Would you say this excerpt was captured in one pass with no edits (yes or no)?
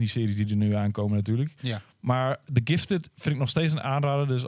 yes